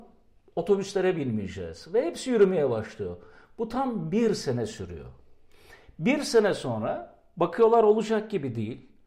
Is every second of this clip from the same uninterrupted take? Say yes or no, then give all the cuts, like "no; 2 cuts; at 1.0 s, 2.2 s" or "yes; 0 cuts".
yes; 0 cuts